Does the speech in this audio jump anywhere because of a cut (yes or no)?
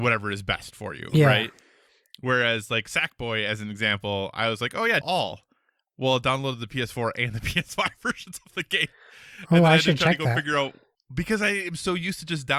yes